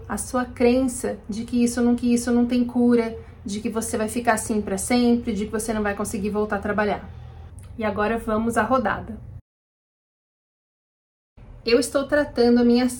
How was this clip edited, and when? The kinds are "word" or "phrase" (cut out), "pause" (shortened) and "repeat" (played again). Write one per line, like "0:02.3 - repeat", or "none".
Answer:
0:02.0 - repeat